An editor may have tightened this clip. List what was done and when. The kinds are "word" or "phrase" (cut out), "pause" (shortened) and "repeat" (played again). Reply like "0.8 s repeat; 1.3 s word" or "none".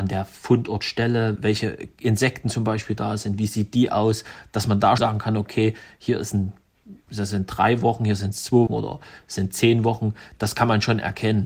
1.4 s word; 5.0 s word; 8.7 s word